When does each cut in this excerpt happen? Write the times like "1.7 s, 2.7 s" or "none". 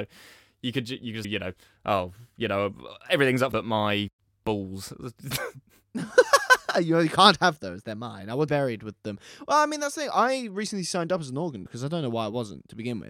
1.2 s, 3.5 s, 8.5 s, 11.7 s

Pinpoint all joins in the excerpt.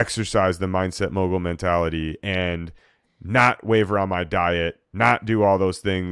none

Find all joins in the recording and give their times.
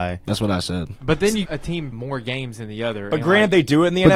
1.4 s, 1.9 s

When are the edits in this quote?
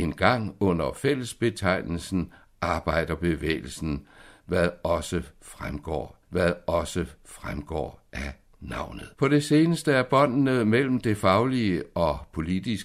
6.2 s, 9.1 s

